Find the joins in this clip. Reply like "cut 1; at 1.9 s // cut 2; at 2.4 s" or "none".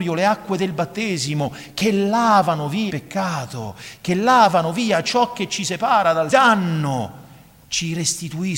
cut 1; at 2.9 s // cut 2; at 6.3 s

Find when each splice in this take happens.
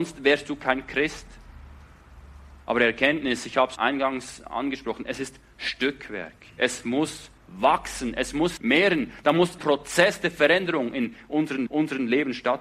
cut 1; at 2.6 s // cut 2; at 3.8 s // cut 3; at 7.4 s // cut 4; at 8.6 s // cut 5; at 9.6 s // cut 6; at 11.7 s

